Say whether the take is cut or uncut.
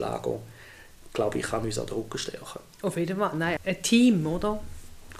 cut